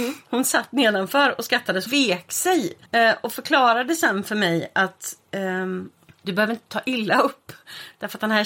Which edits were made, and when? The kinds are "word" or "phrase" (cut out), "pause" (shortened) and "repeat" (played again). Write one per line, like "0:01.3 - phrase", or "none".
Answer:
0:01.9 - word
0:02.9 - pause
0:06.1 - pause